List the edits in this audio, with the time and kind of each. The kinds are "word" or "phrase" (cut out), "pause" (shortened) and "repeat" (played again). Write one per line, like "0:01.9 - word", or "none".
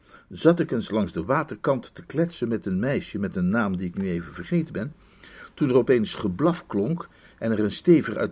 none